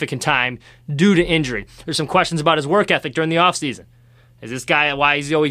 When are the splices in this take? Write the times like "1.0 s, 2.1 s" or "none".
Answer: none